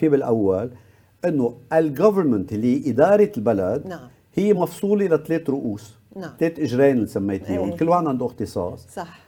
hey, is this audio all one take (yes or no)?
yes